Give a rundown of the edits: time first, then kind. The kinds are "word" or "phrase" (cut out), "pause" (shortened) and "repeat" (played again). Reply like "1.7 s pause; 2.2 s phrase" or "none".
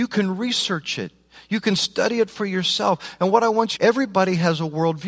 3.8 s phrase